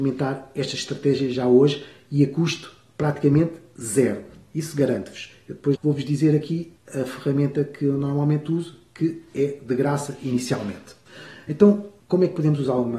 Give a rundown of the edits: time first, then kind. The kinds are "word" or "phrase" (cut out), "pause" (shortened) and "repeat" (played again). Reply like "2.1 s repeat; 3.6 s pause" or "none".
5.8 s phrase